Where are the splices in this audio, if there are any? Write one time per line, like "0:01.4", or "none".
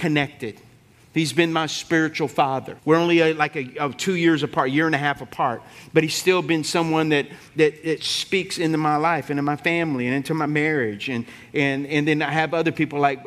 0:02.8